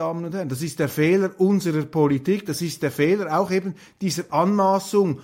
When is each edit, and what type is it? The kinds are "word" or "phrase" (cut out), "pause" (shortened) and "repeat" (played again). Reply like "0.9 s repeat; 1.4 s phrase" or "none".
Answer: none